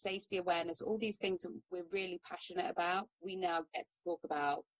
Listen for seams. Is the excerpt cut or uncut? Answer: cut